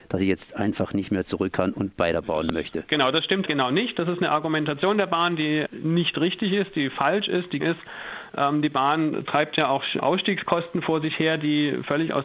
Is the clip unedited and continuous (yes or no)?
no